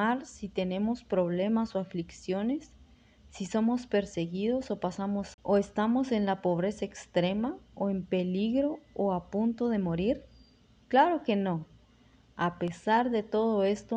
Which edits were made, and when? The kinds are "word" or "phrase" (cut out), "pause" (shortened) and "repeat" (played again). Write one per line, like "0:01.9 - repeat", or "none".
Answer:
0:05.3 - word